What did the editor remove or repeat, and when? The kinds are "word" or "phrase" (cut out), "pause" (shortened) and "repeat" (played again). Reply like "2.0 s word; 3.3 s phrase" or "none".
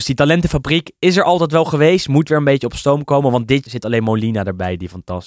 3.6 s word